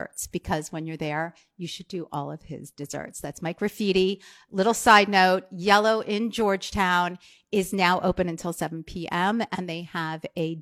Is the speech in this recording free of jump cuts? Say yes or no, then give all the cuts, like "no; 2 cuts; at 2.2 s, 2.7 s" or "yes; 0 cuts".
yes; 0 cuts